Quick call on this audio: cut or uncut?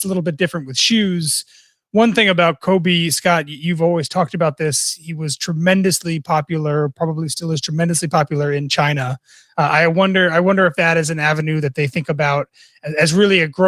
uncut